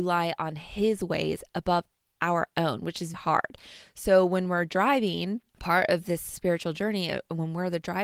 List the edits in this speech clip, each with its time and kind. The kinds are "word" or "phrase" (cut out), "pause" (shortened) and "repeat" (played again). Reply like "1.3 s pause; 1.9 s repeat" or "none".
3.1 s word